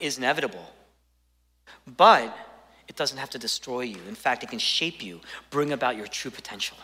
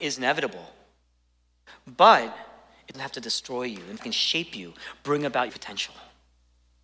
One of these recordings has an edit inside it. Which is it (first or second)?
second